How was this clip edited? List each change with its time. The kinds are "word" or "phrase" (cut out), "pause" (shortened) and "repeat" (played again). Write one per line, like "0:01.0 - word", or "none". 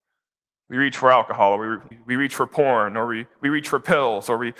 0:01.9 - word